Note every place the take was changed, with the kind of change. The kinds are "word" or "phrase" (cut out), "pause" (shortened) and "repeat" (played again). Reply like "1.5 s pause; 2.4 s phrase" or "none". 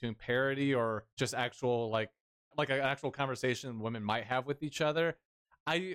1.1 s pause; 2.5 s word